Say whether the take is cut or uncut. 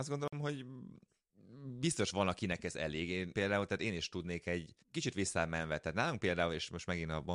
cut